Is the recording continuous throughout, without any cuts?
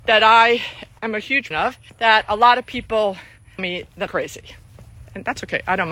no; 5 cuts; at 1.0 s, 1.5 s, 1.9 s, 3.6 s, 4.1 s

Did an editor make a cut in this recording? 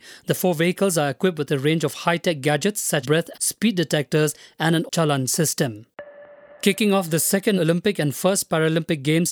yes; 4 cuts; at 3.0 s, 3.3 s, 4.9 s, 7.6 s

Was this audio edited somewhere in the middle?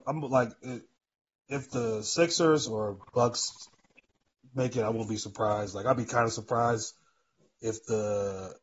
no; 0 cuts

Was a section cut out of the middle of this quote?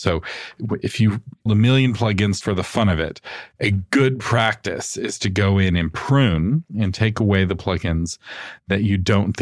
yes; 2 cuts; at 1.5 s, 2.4 s

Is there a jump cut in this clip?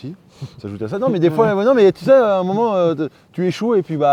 no; 0 cuts

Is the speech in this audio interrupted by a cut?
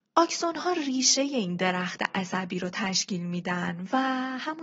no; 0 cuts

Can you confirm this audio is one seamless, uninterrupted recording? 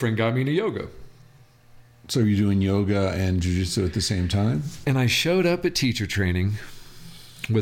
yes; 0 cuts

